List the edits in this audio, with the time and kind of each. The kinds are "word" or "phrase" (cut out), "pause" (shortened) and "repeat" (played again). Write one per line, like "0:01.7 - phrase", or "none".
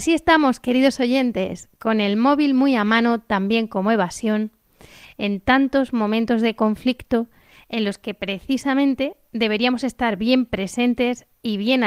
none